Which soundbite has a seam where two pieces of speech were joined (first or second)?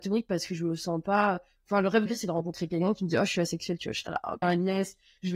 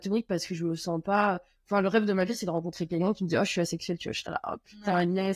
first